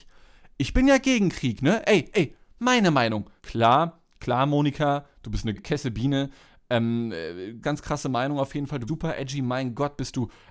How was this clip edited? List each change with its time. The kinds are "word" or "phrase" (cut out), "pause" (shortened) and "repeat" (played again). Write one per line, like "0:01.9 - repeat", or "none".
0:03.4 - pause
0:05.6 - phrase
0:07.6 - word
0:08.9 - word